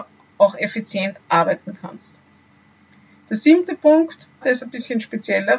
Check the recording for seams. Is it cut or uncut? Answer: cut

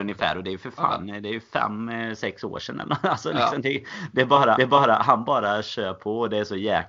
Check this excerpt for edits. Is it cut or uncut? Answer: cut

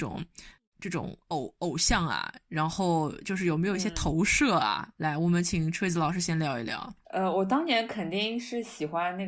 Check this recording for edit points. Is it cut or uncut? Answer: cut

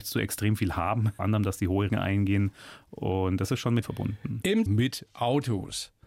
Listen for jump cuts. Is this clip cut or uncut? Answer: cut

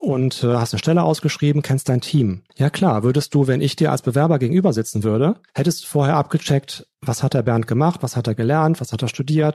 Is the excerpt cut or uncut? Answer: cut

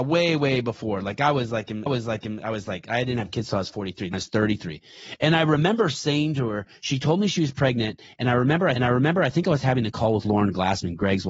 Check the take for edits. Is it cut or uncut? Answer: cut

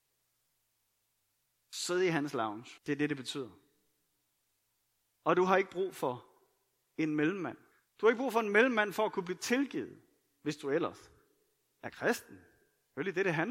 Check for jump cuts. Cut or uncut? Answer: cut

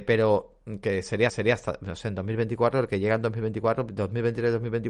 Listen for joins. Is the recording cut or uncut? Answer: cut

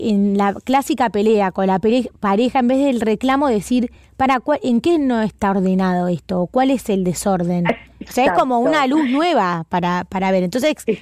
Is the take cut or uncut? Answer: uncut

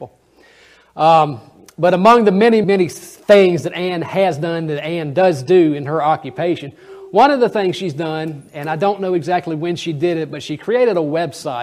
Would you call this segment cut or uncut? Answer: cut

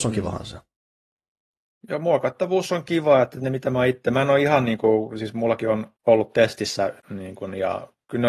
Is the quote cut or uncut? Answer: cut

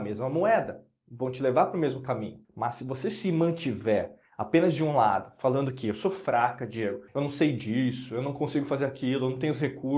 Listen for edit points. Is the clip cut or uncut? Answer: cut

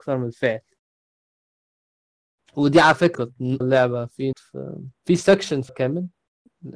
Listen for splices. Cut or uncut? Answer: cut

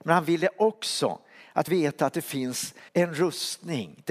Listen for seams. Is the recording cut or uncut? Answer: cut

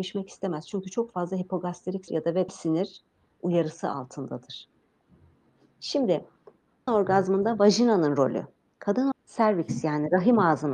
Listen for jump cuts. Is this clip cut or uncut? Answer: cut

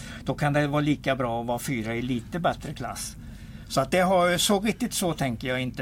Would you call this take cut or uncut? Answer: uncut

